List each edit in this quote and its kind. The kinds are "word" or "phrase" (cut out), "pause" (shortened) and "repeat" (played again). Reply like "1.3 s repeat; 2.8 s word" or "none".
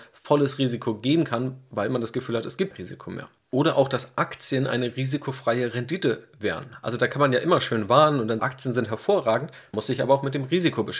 2.7 s word; 3.4 s pause; 8.4 s phrase; 9.7 s word